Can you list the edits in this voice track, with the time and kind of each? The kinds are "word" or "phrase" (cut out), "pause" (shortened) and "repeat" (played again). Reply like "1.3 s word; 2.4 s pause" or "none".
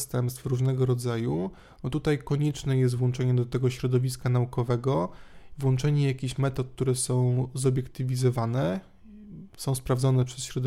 none